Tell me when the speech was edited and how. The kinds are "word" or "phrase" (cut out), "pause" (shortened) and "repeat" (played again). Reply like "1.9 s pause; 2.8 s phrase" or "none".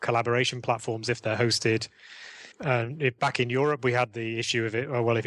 2.5 s pause